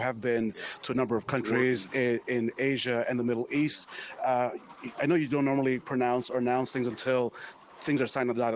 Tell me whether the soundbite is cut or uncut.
uncut